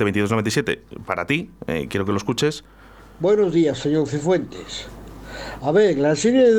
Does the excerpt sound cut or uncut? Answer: uncut